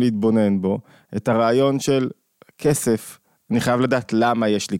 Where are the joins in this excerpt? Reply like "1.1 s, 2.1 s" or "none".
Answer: none